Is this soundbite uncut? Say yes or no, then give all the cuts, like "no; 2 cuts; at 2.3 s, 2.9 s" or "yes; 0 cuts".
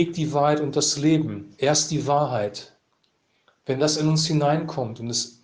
yes; 0 cuts